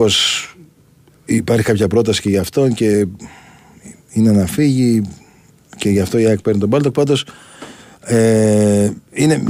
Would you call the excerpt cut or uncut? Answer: uncut